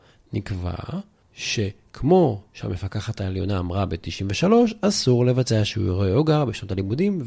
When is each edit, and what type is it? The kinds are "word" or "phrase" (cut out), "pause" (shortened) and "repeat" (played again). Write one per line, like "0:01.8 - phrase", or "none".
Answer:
0:02.5 - pause

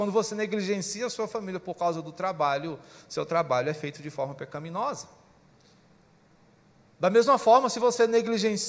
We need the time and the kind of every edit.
none

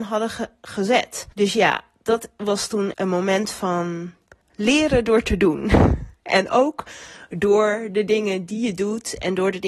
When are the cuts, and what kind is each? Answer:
0:01.3 - pause
0:02.9 - phrase
0:04.4 - word

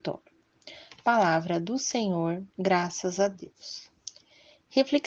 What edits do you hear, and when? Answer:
0:02.5 - pause

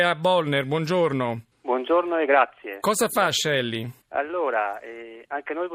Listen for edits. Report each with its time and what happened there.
0:01.5 - pause
0:04.0 - pause

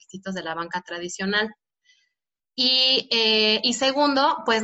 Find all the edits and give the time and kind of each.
none

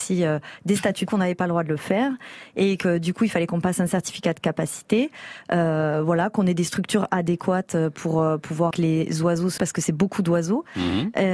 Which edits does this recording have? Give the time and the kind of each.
0:01.1 - word
0:02.8 - word
0:08.7 - word
0:09.6 - word

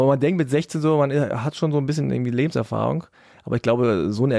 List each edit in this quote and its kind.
none

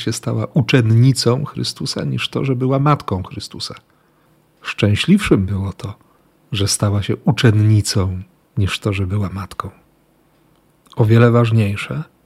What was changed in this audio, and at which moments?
none

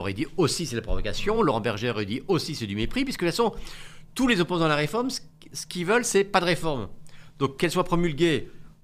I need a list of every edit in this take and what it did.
none

